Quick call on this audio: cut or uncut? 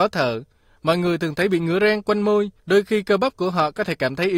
cut